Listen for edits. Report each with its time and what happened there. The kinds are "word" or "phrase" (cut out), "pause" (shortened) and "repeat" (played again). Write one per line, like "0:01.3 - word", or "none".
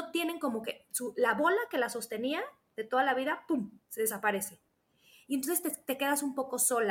none